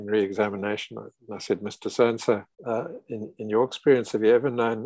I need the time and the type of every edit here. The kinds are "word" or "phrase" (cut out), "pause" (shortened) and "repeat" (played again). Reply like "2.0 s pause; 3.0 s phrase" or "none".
2.5 s pause